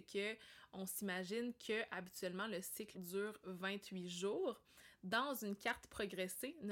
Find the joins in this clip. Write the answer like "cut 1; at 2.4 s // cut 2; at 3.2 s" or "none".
cut 1; at 2.9 s